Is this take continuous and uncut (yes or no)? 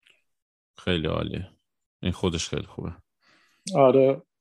yes